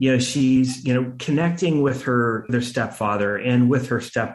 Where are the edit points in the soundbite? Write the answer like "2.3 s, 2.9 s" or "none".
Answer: 2.5 s